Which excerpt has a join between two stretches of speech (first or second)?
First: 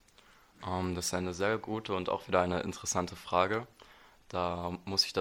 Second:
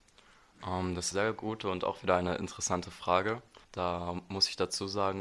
second